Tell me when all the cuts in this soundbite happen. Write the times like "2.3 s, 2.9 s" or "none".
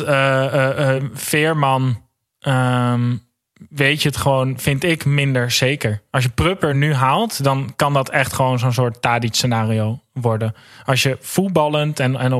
none